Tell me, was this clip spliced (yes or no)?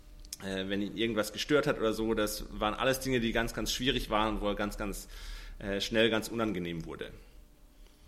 no